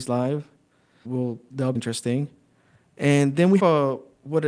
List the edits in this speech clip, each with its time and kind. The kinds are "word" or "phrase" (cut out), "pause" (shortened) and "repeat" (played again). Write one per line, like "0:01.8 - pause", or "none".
0:01.0 - word
0:01.7 - word
0:03.6 - word